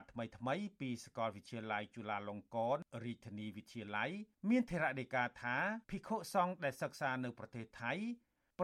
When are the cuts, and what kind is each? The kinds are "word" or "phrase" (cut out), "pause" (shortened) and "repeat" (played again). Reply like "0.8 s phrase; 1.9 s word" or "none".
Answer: 5.8 s pause

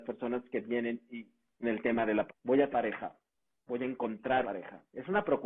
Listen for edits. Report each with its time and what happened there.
1.6 s word; 2.3 s word; 2.7 s word; 4.4 s word

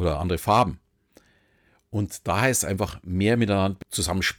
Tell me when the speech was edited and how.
none

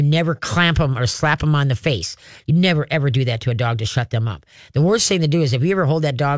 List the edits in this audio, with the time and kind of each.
none

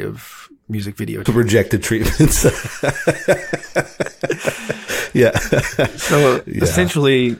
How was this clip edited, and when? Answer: 1.3 s word

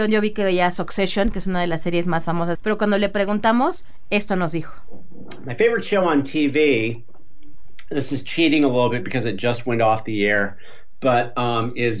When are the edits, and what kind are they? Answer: 2.5 s phrase

